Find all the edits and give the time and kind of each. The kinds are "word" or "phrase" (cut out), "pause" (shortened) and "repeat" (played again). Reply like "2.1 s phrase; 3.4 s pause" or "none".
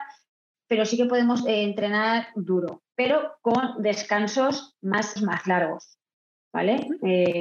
5.2 s phrase